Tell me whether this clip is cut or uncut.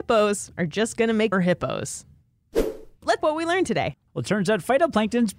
cut